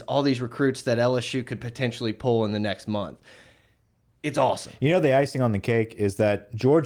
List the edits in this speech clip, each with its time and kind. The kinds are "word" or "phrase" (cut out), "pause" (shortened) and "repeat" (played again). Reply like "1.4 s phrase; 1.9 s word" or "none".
none